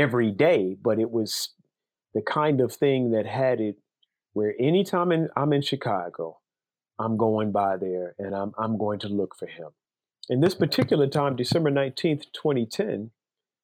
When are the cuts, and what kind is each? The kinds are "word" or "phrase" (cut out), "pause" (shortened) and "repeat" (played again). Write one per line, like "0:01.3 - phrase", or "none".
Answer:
none